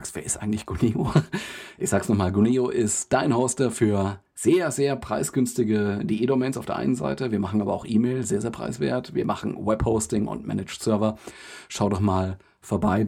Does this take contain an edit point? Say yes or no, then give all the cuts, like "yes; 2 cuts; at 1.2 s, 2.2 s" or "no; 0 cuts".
no; 0 cuts